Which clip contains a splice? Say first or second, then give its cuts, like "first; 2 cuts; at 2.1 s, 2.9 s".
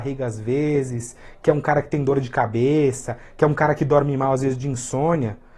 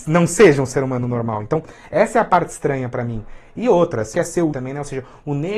second; 2 cuts; at 4.1 s, 4.5 s